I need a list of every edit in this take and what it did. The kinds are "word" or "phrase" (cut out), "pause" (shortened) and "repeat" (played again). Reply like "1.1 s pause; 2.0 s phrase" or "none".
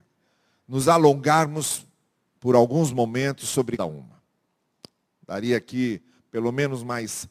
3.8 s word